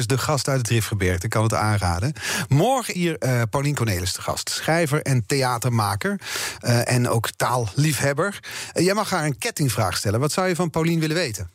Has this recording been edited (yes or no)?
yes